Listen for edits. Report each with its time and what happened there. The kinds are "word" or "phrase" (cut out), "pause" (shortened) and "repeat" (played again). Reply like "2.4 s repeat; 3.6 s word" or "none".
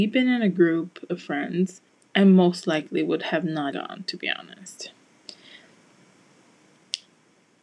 1.9 s pause; 3.7 s word